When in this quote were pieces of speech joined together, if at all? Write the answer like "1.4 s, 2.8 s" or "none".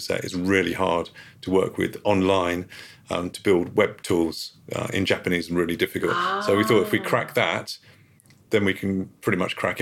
none